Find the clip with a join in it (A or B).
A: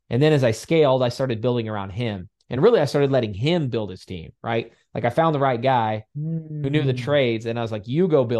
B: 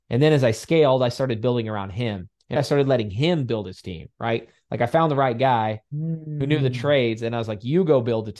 B